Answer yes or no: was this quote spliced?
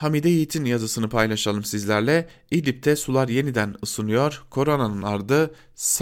no